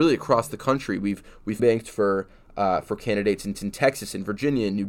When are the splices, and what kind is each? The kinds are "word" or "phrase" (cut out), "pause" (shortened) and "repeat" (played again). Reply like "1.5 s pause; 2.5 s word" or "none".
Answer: 1.6 s word; 3.5 s repeat